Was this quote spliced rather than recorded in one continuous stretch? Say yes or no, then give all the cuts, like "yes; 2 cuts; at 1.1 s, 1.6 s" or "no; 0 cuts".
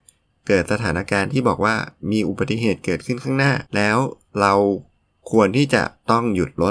yes; 1 cut; at 3.7 s